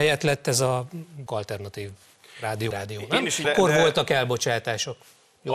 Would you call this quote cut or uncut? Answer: cut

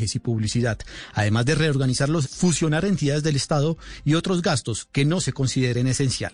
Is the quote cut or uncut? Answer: cut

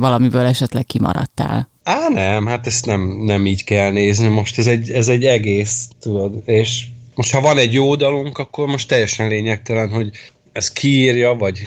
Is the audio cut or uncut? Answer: cut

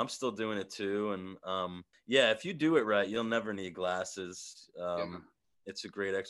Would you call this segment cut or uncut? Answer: cut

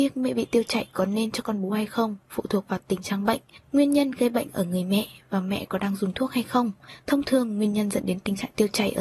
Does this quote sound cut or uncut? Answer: uncut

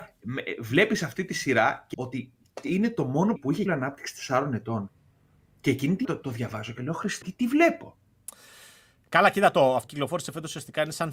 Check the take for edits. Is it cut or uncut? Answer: cut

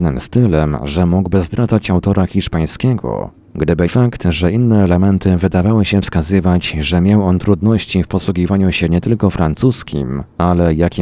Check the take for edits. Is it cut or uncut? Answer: cut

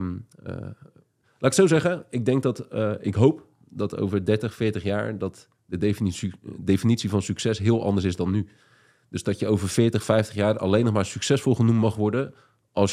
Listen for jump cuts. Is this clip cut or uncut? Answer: uncut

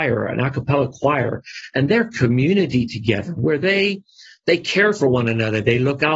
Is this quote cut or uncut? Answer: uncut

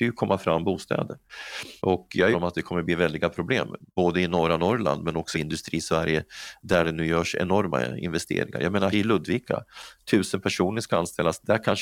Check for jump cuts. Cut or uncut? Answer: cut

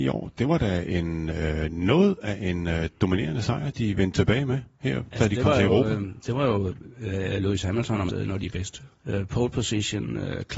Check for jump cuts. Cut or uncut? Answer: cut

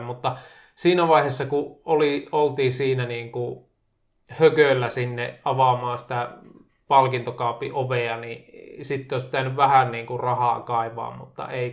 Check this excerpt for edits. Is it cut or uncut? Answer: uncut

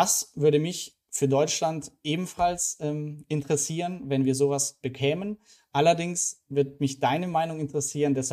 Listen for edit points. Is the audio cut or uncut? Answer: uncut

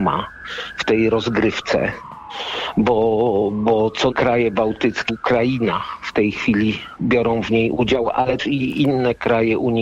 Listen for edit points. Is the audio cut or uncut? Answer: cut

